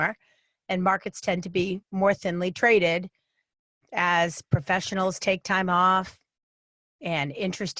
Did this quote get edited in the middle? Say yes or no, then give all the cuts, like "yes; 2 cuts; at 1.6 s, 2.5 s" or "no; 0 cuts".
no; 0 cuts